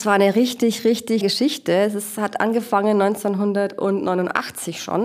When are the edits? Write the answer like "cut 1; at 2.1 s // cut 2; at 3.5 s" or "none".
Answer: cut 1; at 1.2 s